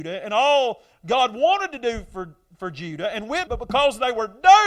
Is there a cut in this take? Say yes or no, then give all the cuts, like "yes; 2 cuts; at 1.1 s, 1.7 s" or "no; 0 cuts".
yes; 1 cut; at 3.5 s